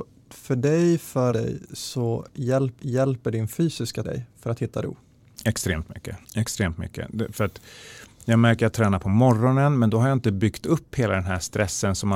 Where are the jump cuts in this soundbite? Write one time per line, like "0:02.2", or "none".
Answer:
0:01.3
0:02.8
0:04.0
0:06.2
0:08.7